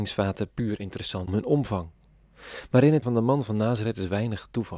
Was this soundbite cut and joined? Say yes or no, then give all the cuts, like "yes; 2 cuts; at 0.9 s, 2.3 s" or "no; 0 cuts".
yes; 2 cuts; at 1.3 s, 3.0 s